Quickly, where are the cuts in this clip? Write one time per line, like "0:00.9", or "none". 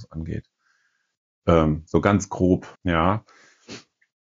0:02.7